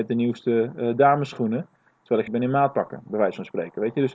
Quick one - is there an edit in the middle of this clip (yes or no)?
yes